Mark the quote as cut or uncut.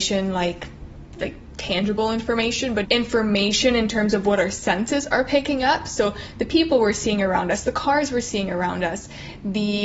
cut